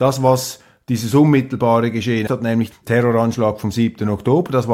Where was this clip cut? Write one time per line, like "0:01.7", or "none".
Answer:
0:02.3
0:02.7